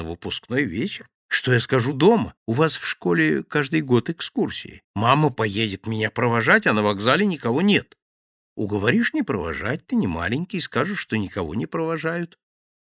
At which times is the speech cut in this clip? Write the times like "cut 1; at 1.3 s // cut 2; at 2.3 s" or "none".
cut 1; at 1.2 s // cut 2; at 2.4 s // cut 3; at 4.8 s